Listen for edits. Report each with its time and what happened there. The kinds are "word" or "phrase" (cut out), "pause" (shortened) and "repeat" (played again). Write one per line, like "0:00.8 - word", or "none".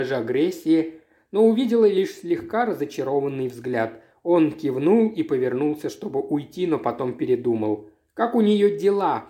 none